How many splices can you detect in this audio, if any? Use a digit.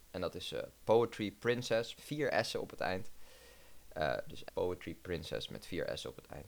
2